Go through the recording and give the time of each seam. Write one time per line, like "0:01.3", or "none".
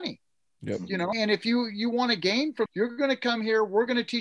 0:01.1
0:02.7